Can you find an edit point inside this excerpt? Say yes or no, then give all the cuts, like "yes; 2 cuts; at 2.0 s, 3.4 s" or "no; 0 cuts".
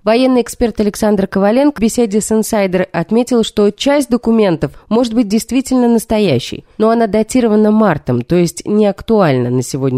yes; 1 cut; at 1.8 s